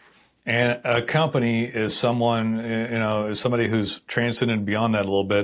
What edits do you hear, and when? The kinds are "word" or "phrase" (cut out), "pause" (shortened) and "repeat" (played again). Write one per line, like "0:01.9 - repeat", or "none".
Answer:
none